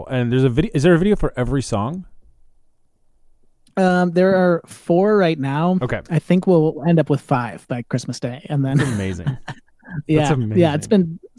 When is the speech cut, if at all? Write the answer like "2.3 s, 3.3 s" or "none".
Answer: none